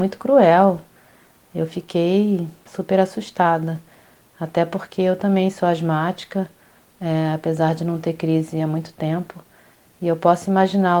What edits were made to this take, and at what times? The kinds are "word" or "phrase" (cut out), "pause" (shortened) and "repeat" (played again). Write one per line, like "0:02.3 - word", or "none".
none